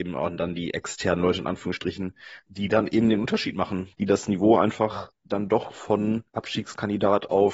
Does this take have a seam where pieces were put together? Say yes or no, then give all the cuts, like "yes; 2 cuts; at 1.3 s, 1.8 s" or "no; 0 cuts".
yes; 2 cuts; at 2.5 s, 6.3 s